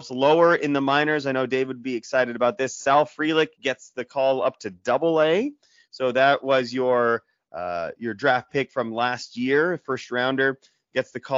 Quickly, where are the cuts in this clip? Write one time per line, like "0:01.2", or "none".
none